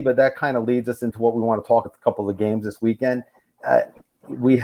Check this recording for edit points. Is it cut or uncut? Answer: cut